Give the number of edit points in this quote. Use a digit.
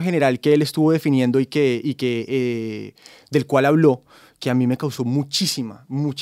0